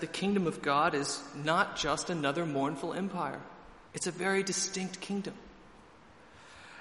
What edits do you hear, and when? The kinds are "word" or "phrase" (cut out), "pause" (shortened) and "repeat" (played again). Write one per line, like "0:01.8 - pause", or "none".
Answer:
0:03.9 - pause